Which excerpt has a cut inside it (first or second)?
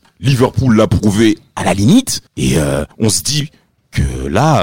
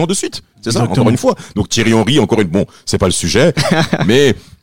first